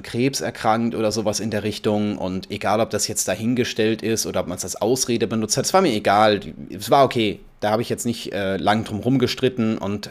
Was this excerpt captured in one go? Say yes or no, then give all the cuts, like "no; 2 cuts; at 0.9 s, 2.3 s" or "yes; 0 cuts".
yes; 0 cuts